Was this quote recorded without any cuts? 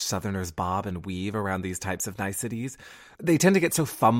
no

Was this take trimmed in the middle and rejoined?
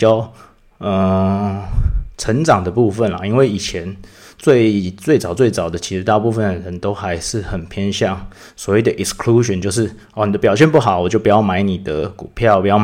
no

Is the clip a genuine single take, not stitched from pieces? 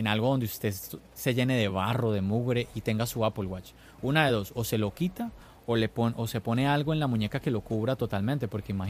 yes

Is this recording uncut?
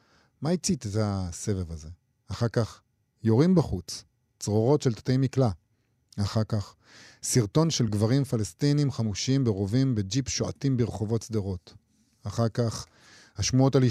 yes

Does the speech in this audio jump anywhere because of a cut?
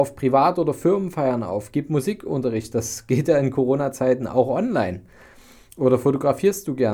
no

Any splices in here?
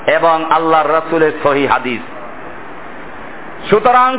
no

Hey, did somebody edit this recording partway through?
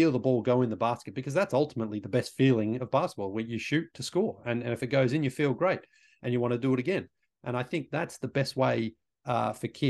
no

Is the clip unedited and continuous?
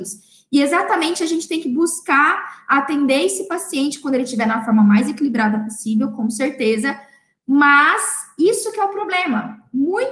yes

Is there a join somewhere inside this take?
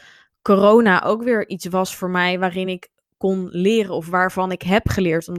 no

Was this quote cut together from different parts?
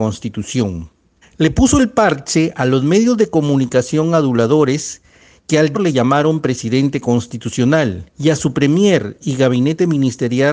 yes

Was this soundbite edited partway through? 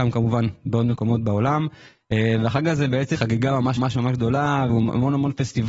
yes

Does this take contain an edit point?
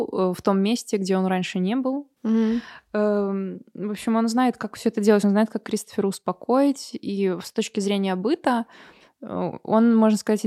no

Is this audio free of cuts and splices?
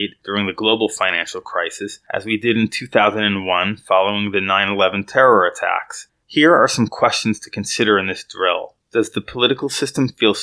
yes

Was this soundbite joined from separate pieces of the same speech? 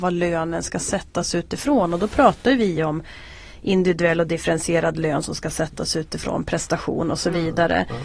no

